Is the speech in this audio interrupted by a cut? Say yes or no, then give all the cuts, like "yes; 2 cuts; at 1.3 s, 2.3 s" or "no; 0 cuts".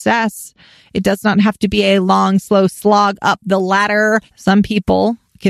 yes; 1 cut; at 4.3 s